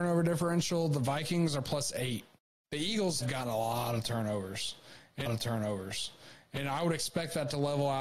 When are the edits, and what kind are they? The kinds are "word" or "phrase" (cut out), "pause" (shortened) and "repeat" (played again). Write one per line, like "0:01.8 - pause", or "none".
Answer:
0:02.4 - pause
0:03.2 - word
0:05.3 - repeat